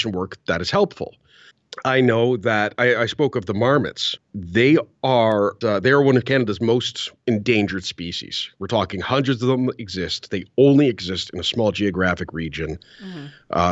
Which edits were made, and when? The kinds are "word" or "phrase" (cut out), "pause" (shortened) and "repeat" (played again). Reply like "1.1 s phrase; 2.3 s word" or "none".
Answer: 5.6 s word